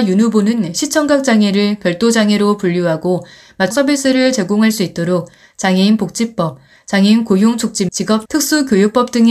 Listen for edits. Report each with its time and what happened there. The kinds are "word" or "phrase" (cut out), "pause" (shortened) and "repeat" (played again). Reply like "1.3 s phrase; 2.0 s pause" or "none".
3.7 s word; 7.9 s word; 8.3 s word

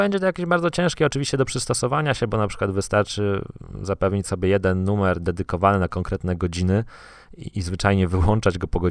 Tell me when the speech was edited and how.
7.5 s word

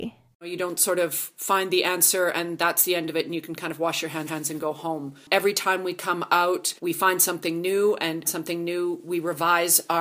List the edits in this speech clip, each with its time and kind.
4.3 s repeat; 6.8 s pause; 8.2 s phrase

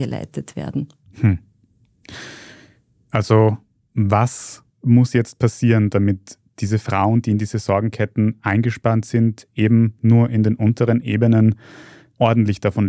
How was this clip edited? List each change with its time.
none

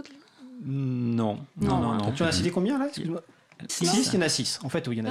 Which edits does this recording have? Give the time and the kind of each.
3.7 s word

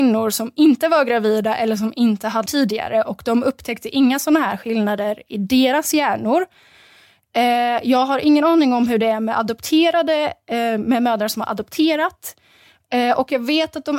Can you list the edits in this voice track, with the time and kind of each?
2.5 s word

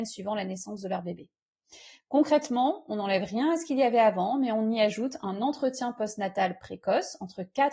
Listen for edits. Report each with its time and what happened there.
none

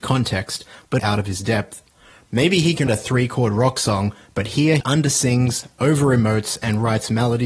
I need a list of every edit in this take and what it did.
1.0 s phrase; 2.9 s word; 4.8 s word

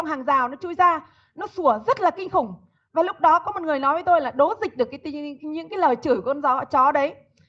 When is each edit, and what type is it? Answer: 5.4 s word

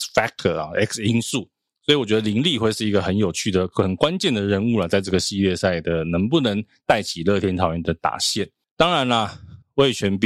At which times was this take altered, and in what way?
none

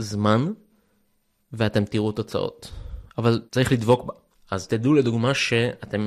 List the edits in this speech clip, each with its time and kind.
3.5 s pause; 4.3 s pause

